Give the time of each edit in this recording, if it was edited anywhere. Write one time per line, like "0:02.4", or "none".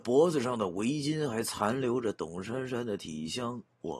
none